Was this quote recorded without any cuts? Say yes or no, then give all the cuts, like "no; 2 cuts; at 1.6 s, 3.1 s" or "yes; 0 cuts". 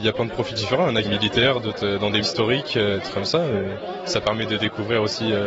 no; 2 cuts; at 1.0 s, 2.2 s